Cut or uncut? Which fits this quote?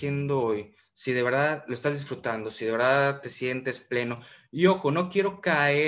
uncut